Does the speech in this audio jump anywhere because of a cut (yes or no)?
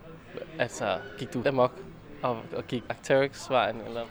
yes